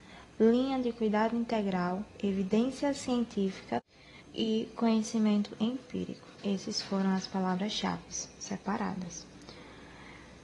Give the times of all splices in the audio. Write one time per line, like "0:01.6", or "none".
0:02.1
0:04.2
0:06.3